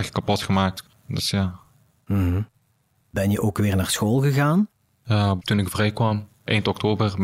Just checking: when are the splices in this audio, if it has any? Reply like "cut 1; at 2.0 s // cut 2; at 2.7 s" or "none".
none